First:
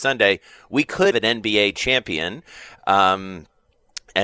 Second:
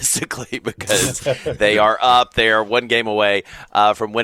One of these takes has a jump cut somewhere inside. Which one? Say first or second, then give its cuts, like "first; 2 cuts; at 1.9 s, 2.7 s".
first; 1 cut; at 1.1 s